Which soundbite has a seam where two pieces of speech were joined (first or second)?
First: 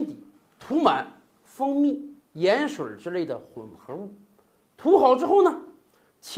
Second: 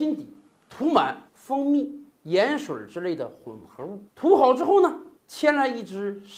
second